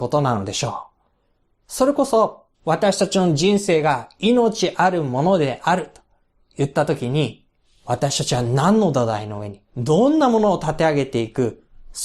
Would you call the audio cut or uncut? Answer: cut